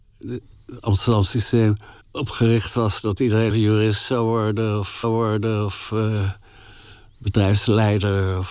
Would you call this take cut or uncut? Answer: cut